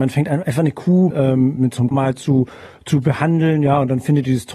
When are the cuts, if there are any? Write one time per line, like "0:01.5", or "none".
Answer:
0:01.1
0:01.6
0:01.9